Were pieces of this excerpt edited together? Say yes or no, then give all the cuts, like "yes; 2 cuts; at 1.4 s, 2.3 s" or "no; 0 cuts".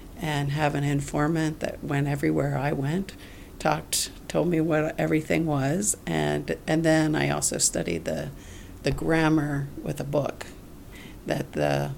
no; 0 cuts